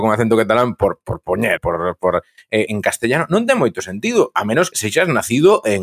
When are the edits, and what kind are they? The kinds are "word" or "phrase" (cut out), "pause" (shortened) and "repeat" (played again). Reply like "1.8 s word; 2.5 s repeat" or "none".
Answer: 1.6 s word; 2.7 s word; 4.7 s word